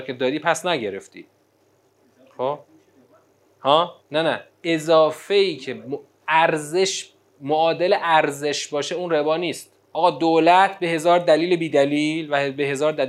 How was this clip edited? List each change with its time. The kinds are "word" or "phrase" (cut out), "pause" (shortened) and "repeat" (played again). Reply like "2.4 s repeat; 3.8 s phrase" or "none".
4.0 s pause; 4.5 s pause; 9.8 s pause